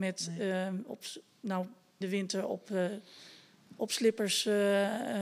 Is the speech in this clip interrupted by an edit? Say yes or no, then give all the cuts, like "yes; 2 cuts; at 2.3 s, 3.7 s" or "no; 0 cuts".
yes; 1 cut; at 2.0 s